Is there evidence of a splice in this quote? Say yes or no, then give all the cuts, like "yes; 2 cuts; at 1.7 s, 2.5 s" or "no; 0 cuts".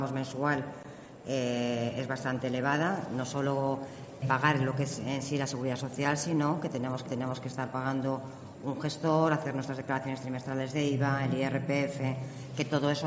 yes; 2 cuts; at 4.2 s, 7.1 s